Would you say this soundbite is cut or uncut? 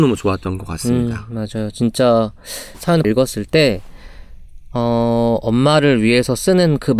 cut